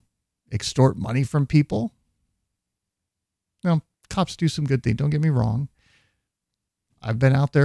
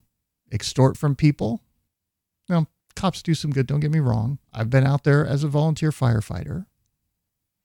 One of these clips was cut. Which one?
second; 4 cuts; at 0.9 s, 1.9 s, 3.7 s, 4.4 s

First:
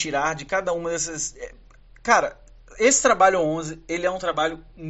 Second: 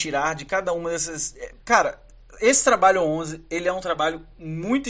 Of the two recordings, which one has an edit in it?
second; 1 cut; at 1.6 s

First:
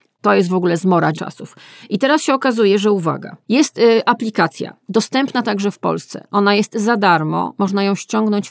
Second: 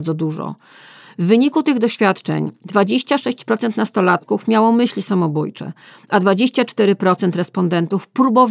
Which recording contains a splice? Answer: first; 2 cuts; at 1.1 s, 3.4 s

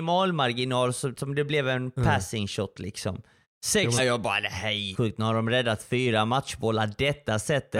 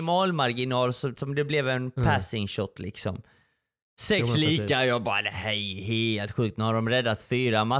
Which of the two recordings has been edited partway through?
first; 3 cuts; at 3.4 s, 4.0 s, 4.9 s

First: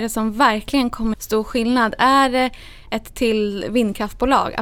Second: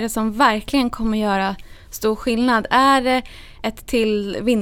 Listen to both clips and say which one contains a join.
first; 1 cut; at 1.1 s

